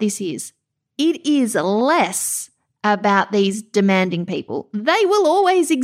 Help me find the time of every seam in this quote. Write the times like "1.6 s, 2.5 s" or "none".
none